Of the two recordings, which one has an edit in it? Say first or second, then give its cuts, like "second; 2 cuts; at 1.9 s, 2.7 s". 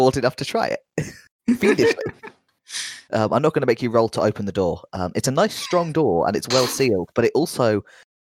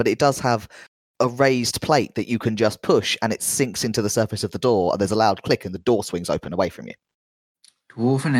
first; 1 cut; at 3.1 s